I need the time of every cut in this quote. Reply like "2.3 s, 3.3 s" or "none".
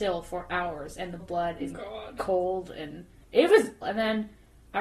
1.2 s, 1.7 s, 3.8 s